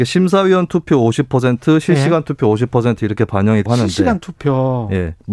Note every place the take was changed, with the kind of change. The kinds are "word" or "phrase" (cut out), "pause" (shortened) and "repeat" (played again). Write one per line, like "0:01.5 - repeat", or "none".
0:03.7 - word